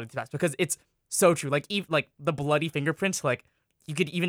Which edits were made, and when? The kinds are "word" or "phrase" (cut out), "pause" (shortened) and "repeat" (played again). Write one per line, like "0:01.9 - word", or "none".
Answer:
none